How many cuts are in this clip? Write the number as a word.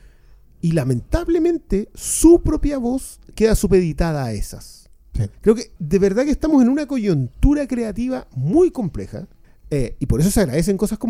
three